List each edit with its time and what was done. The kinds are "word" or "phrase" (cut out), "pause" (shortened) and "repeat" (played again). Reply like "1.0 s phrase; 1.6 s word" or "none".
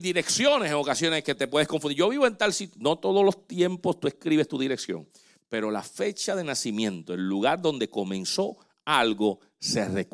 none